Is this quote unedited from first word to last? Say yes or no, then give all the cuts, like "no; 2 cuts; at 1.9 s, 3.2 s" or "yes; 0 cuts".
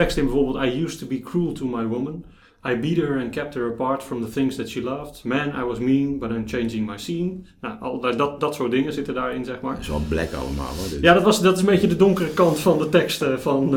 no; 1 cut; at 12.6 s